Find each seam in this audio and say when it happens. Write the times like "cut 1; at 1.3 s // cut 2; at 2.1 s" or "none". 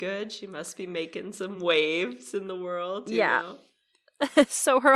none